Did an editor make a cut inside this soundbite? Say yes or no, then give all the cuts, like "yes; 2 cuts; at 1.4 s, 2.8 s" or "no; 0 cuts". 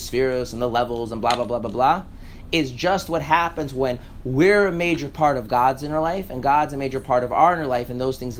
no; 0 cuts